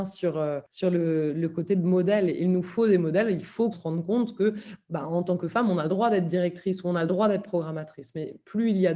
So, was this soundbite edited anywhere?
yes; 1 cut; at 3.7 s

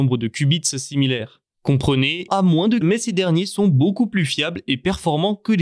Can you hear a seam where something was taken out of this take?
yes; 2 cuts; at 2.3 s, 2.8 s

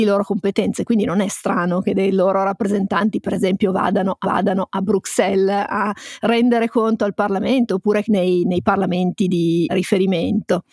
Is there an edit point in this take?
yes; 3 cuts; at 4.2 s, 8.0 s, 9.7 s

